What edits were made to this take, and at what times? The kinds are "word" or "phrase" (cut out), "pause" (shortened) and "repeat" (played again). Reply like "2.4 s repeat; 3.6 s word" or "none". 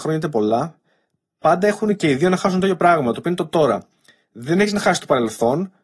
none